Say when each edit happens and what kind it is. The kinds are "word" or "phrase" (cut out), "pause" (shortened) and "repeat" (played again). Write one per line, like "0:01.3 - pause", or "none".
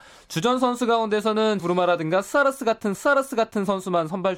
0:01.6 - word
0:02.9 - repeat